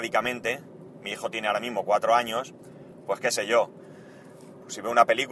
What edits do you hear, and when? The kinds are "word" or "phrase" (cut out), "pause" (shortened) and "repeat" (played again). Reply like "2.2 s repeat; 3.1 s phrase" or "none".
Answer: none

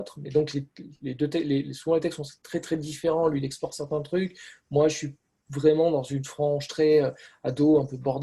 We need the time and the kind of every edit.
none

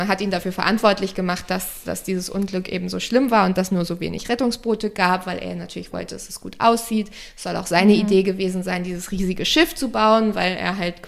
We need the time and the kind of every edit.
none

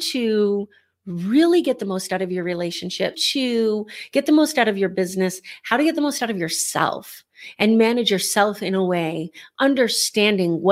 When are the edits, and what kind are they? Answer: 3.1 s word

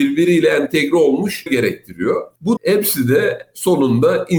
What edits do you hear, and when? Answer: 1.5 s word; 2.6 s word

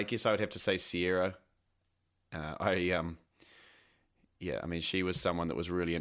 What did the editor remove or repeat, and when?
none

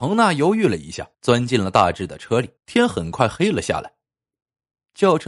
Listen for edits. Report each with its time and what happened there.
1.1 s pause; 2.6 s pause

